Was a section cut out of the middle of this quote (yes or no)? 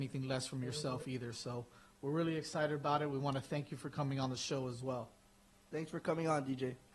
no